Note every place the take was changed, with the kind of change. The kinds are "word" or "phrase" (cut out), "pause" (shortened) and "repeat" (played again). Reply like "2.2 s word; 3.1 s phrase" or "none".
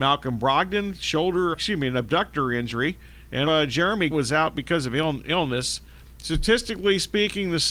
1.5 s word; 3.5 s word; 4.1 s word